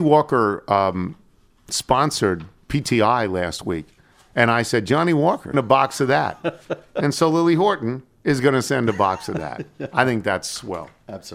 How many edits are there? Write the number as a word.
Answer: one